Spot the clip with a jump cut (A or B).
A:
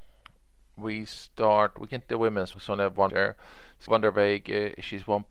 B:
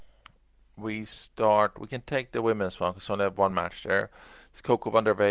A